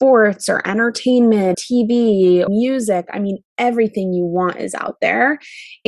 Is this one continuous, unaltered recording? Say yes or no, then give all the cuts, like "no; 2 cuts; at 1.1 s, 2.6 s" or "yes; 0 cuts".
no; 2 cuts; at 1.5 s, 2.5 s